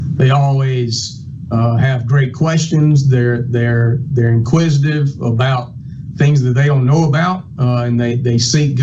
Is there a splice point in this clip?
no; 0 cuts

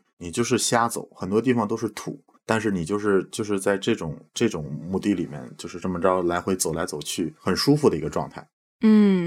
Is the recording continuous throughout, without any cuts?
no; 2 cuts; at 2.4 s, 7.4 s

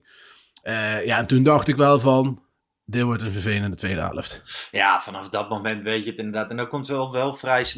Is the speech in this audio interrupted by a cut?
no; 0 cuts

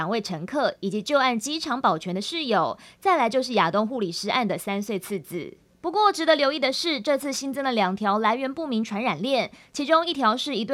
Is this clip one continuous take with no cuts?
yes; 0 cuts

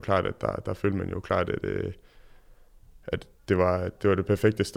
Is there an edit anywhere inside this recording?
no; 0 cuts

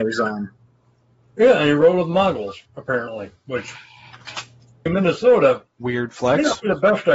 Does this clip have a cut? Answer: yes; 3 cuts; at 2.7 s, 4.9 s, 5.7 s

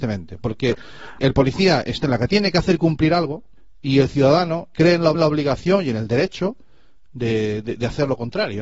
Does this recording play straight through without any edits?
no; 5 cuts; at 1.2 s, 2.0 s, 3.6 s, 4.7 s, 5.1 s

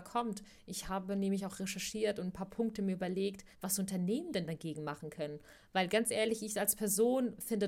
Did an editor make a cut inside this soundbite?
yes; 1 cut; at 3.5 s

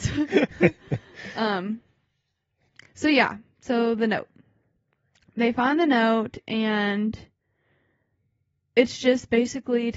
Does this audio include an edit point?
no; 0 cuts

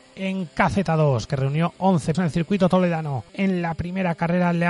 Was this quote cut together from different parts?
yes; 3 cuts; at 1.3 s, 2.1 s, 3.3 s

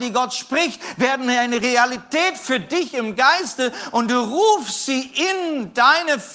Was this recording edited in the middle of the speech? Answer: no; 0 cuts

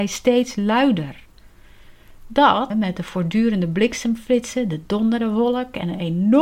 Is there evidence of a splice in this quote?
yes; 1 cut; at 2.7 s

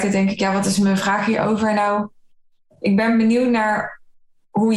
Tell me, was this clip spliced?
no; 0 cuts

